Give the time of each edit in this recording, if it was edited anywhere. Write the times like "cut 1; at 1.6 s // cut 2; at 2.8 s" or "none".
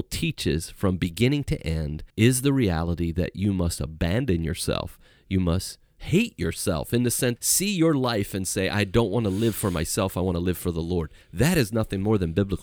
cut 1; at 2.1 s // cut 2; at 7.4 s